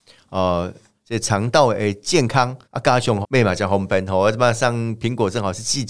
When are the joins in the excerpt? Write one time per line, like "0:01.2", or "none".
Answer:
0:02.6
0:03.2